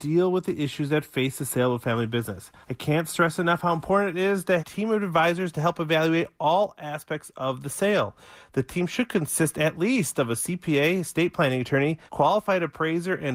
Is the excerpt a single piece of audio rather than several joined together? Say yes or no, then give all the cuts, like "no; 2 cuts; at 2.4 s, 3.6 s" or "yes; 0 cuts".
no; 3 cuts; at 2.6 s, 4.6 s, 12.1 s